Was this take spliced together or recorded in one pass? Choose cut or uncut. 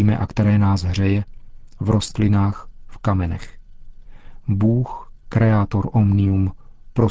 uncut